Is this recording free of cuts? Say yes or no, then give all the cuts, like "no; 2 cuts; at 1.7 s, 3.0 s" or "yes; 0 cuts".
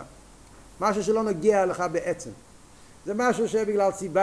yes; 0 cuts